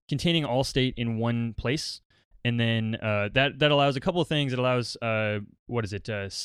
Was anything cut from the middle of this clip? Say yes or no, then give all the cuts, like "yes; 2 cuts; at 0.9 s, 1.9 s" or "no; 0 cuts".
no; 0 cuts